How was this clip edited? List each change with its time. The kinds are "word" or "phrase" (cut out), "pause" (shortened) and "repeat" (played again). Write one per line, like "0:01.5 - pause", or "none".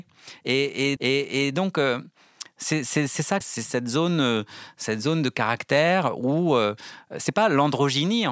0:01.0 - repeat
0:03.4 - phrase